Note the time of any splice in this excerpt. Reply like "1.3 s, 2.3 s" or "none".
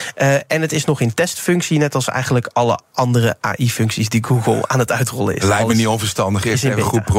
none